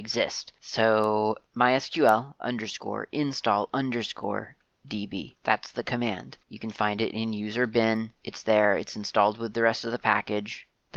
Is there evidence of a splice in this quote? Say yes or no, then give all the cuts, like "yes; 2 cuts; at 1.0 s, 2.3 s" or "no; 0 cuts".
no; 0 cuts